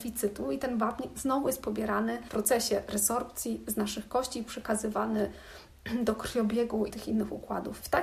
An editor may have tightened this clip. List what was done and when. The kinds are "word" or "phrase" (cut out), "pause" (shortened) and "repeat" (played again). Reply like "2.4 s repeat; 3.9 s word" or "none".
6.9 s phrase